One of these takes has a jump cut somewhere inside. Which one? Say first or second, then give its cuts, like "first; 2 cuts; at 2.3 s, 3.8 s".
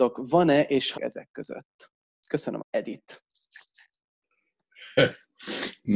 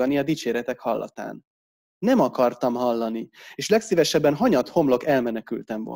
first; 2 cuts; at 1.0 s, 2.6 s